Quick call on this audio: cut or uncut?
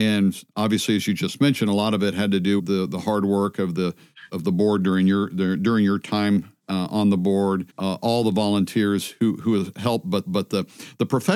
cut